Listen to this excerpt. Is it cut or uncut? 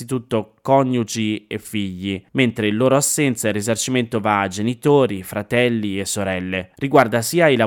cut